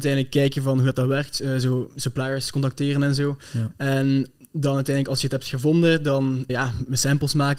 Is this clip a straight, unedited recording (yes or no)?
no